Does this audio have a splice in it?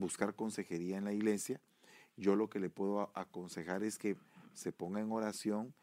no; 0 cuts

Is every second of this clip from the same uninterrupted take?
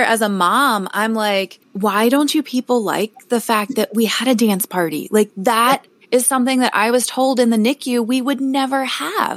no; 1 cut; at 1.6 s

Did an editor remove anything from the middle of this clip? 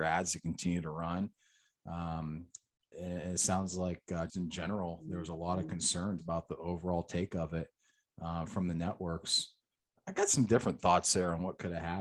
yes; 3 cuts; at 2.9 s, 4.3 s, 6.2 s

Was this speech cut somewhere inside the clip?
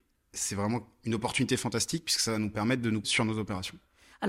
yes; 1 cut; at 3.0 s

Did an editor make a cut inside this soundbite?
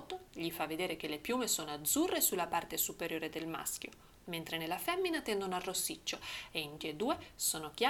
yes; 1 cut; at 6.8 s

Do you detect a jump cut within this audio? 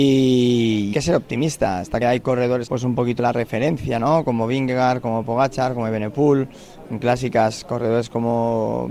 yes; 4 cuts; at 0.9 s, 2.0 s, 2.7 s, 3.2 s

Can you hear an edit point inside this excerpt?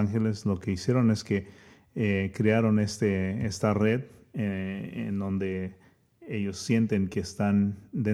no; 0 cuts

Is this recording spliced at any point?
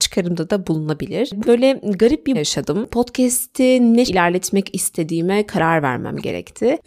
yes; 3 cuts; at 1.4 s, 2.3 s, 4.1 s

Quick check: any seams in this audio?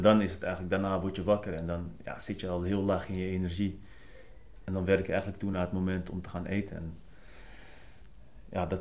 no; 0 cuts

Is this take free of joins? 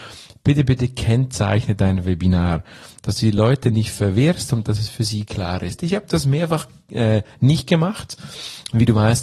yes; 0 cuts

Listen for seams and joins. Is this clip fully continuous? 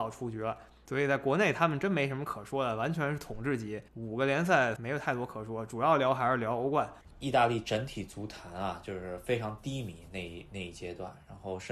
no; 2 cuts; at 3.9 s, 4.8 s

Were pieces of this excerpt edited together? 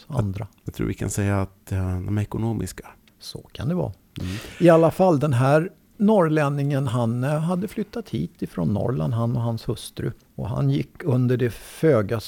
no; 0 cuts

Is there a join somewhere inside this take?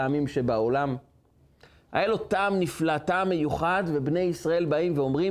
no; 0 cuts

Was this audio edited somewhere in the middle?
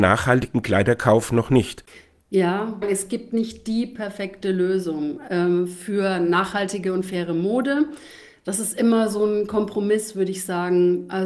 no; 0 cuts

